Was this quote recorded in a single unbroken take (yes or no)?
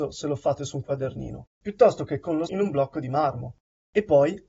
no